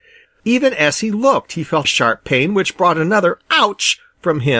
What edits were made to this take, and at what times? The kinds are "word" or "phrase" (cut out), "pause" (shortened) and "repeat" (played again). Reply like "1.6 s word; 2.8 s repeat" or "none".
1.8 s word

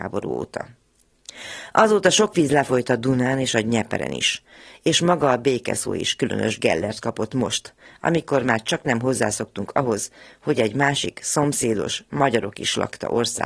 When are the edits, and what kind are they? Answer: none

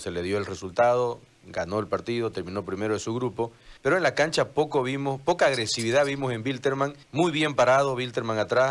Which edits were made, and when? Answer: 3.8 s pause; 7.0 s pause

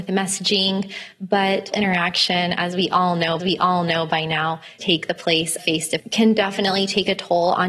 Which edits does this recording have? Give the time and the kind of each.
1.7 s word; 3.4 s repeat; 4.8 s word; 5.6 s word; 6.0 s phrase

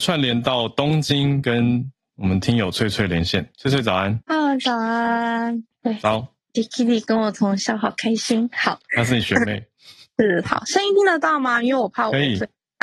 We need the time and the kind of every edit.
4.2 s pause

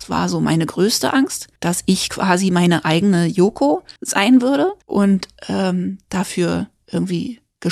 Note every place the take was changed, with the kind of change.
1.6 s pause; 4.0 s pause; 4.8 s pause

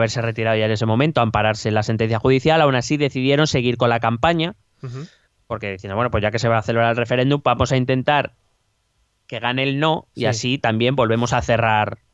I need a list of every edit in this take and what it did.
none

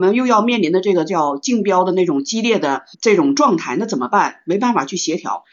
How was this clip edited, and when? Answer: 2.9 s pause

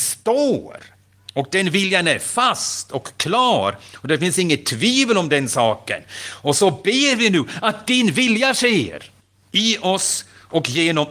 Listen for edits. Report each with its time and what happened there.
9.2 s pause

